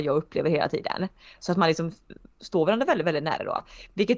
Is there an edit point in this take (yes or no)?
no